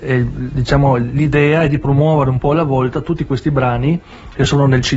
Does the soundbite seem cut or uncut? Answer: uncut